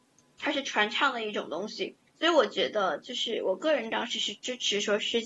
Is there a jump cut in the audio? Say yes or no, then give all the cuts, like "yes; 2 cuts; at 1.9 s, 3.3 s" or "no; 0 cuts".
yes; 1 cut; at 2.1 s